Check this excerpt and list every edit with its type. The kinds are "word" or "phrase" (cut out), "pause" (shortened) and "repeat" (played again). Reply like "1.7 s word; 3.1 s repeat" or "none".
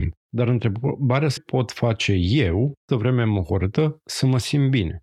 1.4 s phrase; 2.9 s word

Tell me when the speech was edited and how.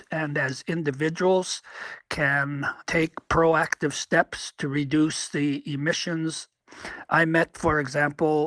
none

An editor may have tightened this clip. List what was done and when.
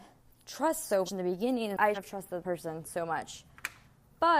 1.1 s word; 1.9 s word; 2.4 s word

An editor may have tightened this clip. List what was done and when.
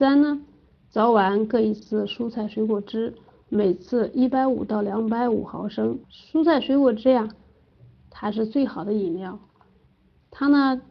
6.0 s pause

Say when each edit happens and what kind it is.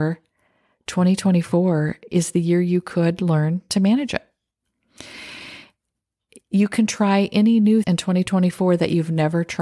7.8 s word

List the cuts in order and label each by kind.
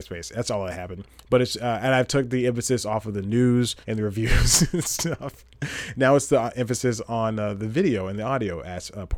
3.8 s pause

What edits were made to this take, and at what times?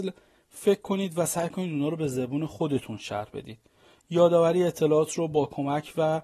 none

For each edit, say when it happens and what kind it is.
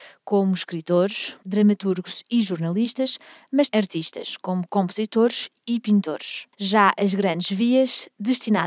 1.4 s word; 3.7 s word; 6.5 s pause

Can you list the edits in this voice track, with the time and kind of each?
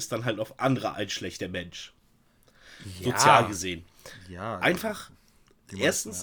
0.9 s word

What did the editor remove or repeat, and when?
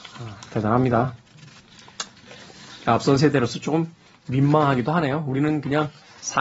none

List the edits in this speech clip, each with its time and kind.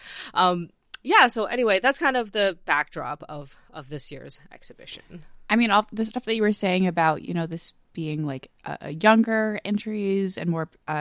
8.6 s pause

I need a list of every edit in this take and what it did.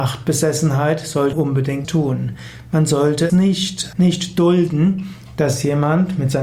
1.3 s word; 1.8 s word; 3.3 s word; 3.9 s word

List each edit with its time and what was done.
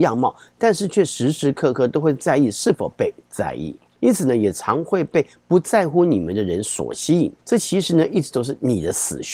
3.9 s pause; 7.4 s pause

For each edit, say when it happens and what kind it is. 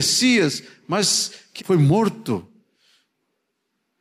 1.6 s word

